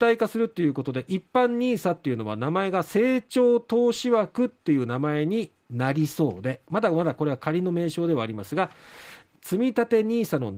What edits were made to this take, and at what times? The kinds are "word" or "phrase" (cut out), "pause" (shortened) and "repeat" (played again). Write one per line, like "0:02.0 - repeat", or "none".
0:09.2 - word